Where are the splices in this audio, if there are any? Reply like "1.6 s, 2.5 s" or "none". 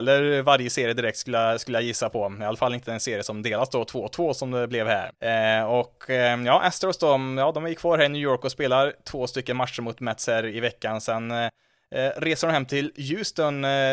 5.1 s